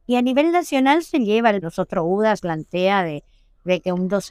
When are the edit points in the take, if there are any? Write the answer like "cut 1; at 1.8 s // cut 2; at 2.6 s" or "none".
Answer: cut 1; at 1.6 s // cut 2; at 2.4 s